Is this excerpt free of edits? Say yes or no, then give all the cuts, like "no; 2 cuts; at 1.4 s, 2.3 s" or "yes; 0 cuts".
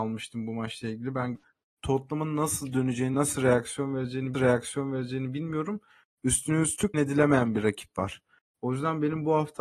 no; 4 cuts; at 1.3 s, 3.1 s, 4.3 s, 6.9 s